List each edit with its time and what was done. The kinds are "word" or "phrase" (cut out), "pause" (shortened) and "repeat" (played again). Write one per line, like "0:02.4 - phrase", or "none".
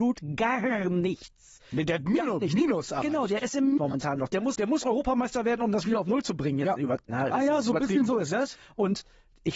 0:03.8 - word
0:04.5 - word
0:07.3 - word